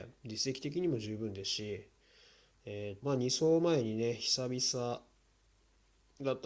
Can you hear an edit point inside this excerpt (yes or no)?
yes